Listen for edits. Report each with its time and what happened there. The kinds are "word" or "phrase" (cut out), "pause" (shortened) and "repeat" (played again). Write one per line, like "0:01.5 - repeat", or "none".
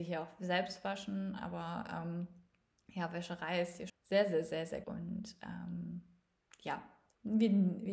0:03.9 - word
0:04.8 - word